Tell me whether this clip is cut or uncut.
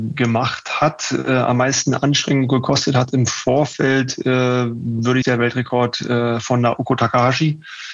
cut